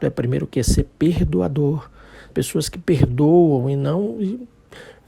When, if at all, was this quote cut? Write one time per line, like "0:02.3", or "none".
0:02.3